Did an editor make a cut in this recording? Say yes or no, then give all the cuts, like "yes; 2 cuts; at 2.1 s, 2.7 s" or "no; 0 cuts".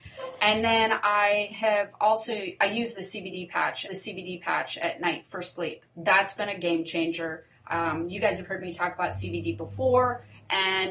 yes; 2 cuts; at 3.9 s, 5.9 s